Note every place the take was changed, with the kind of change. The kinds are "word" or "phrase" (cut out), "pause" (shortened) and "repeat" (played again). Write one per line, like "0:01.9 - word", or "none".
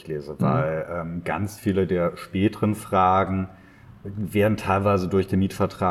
none